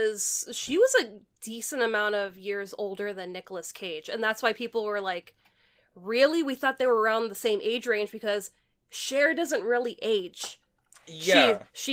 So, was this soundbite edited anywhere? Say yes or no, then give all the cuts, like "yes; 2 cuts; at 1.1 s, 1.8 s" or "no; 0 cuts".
no; 0 cuts